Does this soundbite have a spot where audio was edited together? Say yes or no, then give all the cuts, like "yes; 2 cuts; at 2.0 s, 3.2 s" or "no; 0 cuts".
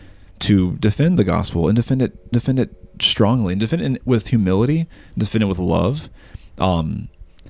yes; 1 cut; at 2.3 s